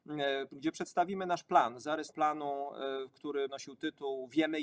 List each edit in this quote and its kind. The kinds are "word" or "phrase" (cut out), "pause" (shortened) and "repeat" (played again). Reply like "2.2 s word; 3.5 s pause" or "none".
2.1 s word; 3.5 s word